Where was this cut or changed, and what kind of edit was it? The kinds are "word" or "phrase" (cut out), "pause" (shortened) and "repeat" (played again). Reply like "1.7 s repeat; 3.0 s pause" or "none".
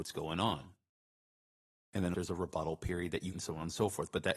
2.1 s phrase; 3.3 s phrase